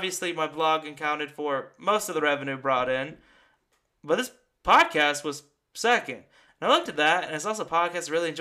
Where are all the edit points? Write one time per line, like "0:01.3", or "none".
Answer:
none